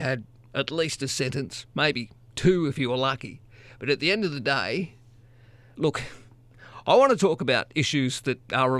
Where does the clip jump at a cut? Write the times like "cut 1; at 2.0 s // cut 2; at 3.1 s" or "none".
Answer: cut 1; at 5.7 s